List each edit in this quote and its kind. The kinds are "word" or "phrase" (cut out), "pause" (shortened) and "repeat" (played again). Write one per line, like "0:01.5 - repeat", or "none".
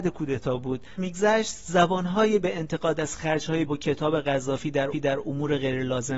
0:01.0 - phrase
0:02.4 - word
0:03.7 - word
0:04.9 - repeat

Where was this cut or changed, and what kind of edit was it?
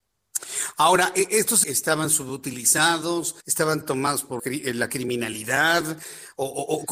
0:01.6 - phrase
0:03.4 - pause
0:04.4 - word

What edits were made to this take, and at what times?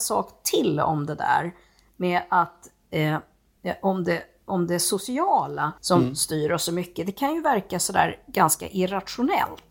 0:05.8 - pause

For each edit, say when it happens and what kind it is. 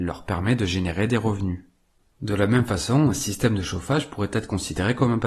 none

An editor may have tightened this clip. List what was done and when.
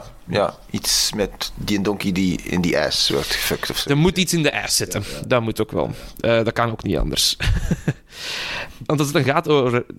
none

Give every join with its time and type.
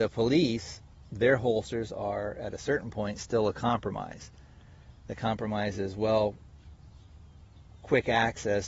none

